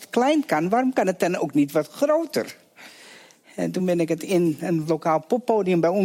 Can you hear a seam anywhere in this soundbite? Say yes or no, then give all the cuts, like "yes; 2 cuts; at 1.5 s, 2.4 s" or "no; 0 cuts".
no; 0 cuts